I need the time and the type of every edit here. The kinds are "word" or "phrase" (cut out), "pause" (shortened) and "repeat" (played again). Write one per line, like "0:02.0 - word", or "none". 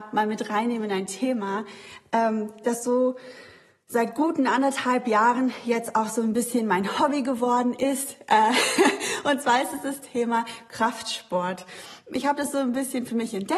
none